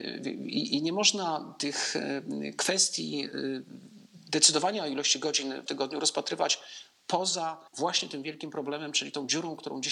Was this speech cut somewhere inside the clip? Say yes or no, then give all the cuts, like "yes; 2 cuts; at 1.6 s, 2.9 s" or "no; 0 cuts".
yes; 2 cuts; at 5.7 s, 7.7 s